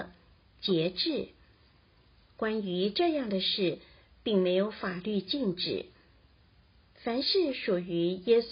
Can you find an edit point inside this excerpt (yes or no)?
no